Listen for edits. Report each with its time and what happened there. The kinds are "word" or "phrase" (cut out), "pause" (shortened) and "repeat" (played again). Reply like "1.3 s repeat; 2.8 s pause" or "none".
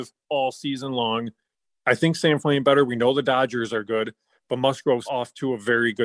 2.4 s word; 5.1 s word